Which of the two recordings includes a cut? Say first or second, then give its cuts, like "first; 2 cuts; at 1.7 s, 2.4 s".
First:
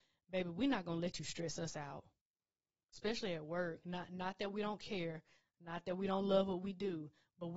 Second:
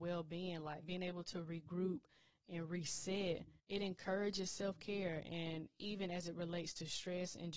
second; 1 cut; at 3.6 s